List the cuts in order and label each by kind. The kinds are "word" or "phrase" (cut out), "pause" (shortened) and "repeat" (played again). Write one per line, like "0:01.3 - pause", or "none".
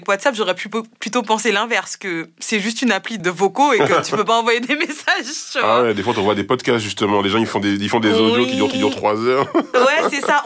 0:03.2 - word
0:08.7 - repeat